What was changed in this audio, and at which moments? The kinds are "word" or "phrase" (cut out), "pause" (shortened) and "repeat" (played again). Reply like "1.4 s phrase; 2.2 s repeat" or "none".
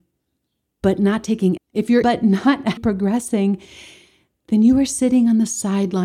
1.6 s word; 2.0 s word; 2.8 s word